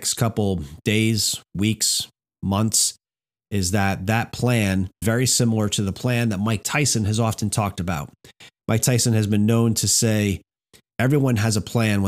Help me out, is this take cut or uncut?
cut